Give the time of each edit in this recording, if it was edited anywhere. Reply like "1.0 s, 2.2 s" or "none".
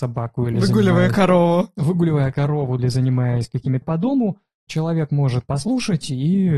2.8 s, 3.8 s, 4.7 s, 5.5 s